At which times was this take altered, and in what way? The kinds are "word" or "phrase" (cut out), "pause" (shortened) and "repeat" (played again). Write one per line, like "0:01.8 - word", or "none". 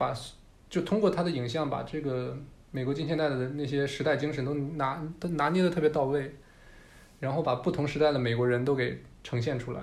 none